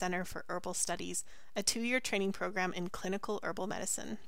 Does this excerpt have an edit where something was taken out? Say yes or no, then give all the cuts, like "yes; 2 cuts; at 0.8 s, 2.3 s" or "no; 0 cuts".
no; 0 cuts